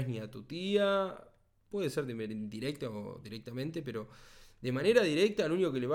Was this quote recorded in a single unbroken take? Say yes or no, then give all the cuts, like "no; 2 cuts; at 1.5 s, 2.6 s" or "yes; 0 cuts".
yes; 0 cuts